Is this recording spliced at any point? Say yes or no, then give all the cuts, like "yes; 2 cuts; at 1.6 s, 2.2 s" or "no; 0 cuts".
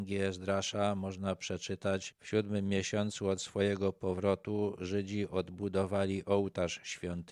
yes; 1 cut; at 2.1 s